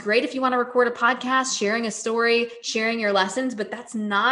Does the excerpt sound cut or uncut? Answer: uncut